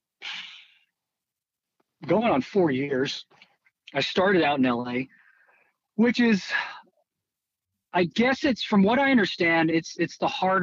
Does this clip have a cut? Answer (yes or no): no